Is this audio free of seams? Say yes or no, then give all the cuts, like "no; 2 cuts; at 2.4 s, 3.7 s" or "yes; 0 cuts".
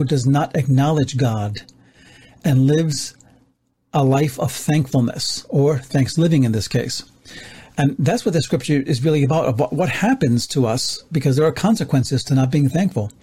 yes; 0 cuts